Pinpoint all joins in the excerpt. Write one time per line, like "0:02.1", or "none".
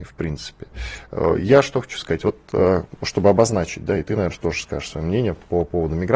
none